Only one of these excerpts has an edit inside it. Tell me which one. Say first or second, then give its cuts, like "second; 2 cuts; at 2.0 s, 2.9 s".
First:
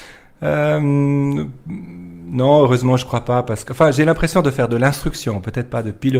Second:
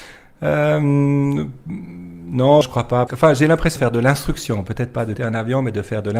second; 4 cuts; at 2.6 s, 3.1 s, 3.8 s, 5.2 s